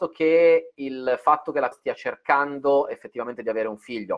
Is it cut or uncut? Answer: cut